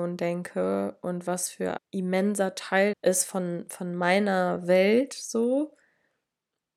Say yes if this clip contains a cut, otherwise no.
yes